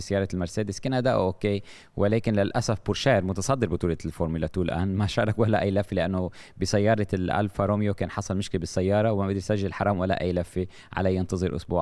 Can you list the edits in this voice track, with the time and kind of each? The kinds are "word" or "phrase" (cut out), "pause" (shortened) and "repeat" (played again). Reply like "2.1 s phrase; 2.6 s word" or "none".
none